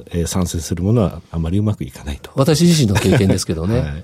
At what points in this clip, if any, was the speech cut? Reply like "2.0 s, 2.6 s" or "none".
1.3 s

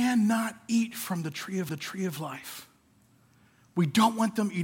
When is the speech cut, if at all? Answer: 1.7 s

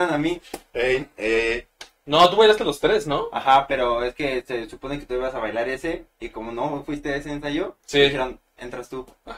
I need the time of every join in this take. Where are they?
none

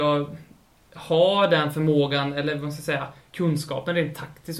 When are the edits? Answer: none

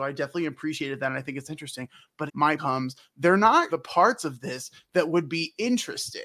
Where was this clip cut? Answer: 2.3 s, 2.6 s, 3.7 s

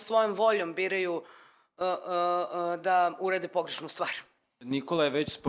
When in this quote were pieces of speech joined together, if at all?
none

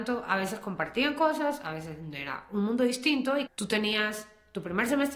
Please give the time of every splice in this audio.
3.5 s

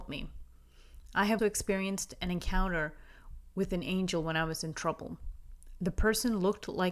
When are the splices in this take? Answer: 1.4 s

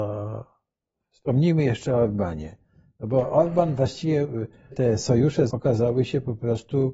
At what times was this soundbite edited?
4.7 s, 5.5 s

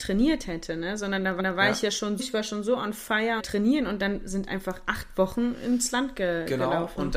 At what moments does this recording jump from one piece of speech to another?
1.4 s, 2.2 s, 3.4 s

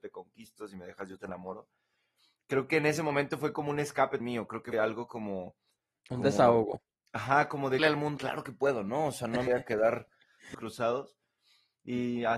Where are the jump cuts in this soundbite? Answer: 4.2 s, 4.7 s, 7.8 s, 8.2 s, 9.5 s, 10.5 s

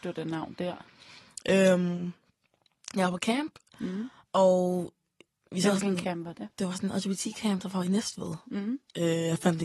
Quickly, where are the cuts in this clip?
none

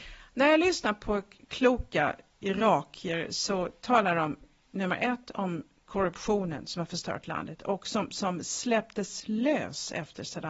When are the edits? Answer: none

